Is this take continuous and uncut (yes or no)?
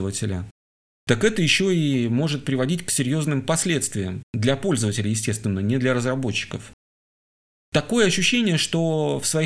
no